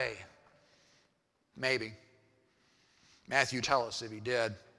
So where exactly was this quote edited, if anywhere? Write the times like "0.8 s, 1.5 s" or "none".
3.6 s